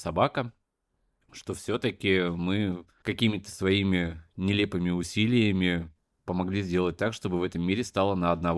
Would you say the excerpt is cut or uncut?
uncut